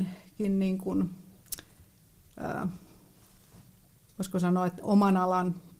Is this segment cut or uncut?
uncut